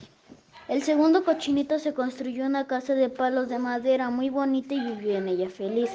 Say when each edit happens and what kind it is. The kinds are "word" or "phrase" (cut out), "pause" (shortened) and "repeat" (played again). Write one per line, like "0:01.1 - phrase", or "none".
none